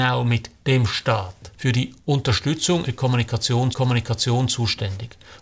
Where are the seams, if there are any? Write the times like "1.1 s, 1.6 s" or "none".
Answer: 1.5 s, 2.8 s, 3.7 s